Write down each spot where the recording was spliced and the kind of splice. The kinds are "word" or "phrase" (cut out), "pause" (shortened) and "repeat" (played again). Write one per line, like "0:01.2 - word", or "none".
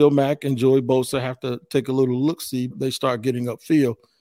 0:02.7 - word